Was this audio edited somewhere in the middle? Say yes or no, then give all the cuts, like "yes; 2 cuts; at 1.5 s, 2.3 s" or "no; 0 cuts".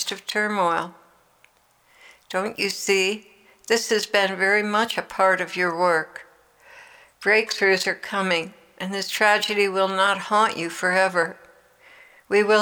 no; 0 cuts